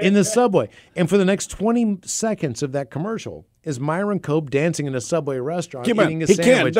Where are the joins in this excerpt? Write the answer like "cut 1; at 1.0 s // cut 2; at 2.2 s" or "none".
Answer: none